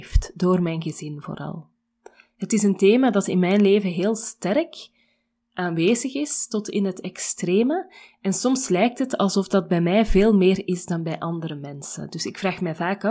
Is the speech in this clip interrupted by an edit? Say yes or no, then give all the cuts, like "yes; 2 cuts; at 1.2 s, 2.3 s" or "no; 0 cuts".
no; 0 cuts